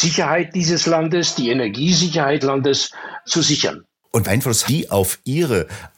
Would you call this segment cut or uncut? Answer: cut